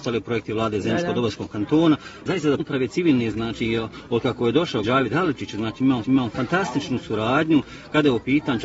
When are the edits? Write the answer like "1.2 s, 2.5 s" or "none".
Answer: 2.3 s, 2.6 s, 3.3 s, 4.8 s, 6.0 s